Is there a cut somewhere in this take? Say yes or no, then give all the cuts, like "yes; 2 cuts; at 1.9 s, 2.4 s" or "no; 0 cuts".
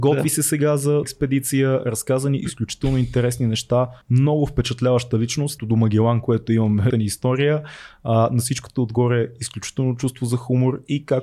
yes; 4 cuts; at 1.0 s, 4.0 s, 5.6 s, 6.9 s